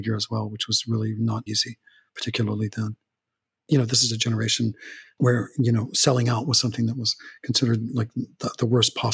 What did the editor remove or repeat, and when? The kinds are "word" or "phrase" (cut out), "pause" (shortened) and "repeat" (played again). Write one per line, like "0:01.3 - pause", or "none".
0:01.5 - word

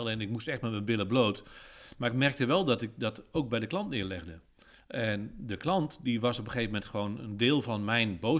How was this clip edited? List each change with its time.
none

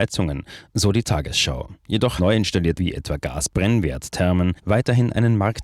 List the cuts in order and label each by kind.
0:02.2 - word
0:02.8 - word
0:04.6 - pause

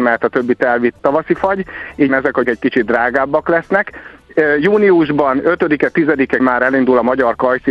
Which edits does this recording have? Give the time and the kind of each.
0:01.0 - word
0:02.1 - word
0:02.4 - word
0:06.4 - word

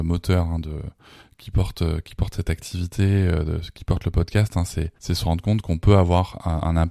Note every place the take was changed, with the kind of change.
0:05.0 - pause

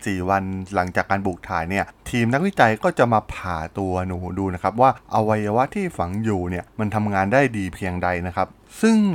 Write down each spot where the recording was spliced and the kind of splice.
0:06.7 - pause

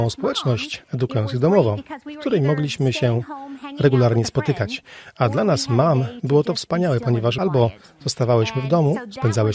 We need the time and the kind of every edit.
none

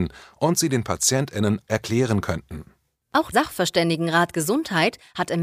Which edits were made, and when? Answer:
0:01.6 - word
0:03.3 - word

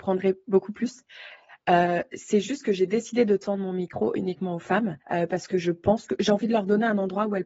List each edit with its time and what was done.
0:05.0 - pause

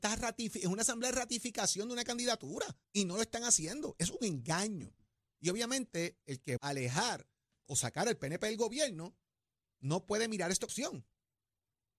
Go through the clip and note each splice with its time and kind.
0:02.8 - pause
0:06.6 - word
0:07.7 - word
0:10.7 - phrase

